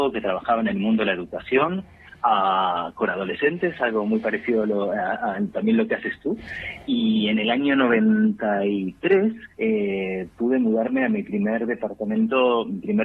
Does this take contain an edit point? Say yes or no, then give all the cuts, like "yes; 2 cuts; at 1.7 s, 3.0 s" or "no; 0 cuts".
yes; 1 cut; at 9.5 s